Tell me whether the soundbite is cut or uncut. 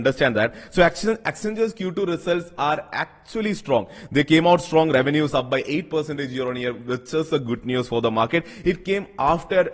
uncut